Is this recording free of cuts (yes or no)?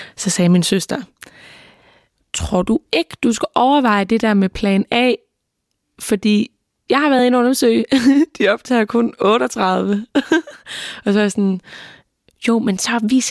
yes